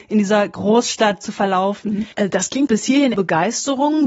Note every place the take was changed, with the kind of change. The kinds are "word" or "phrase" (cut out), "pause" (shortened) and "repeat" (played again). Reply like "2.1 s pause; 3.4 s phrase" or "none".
2.1 s pause; 2.7 s word; 3.1 s phrase